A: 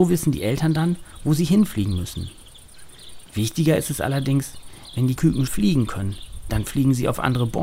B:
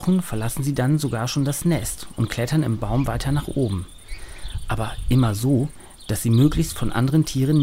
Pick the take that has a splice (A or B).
A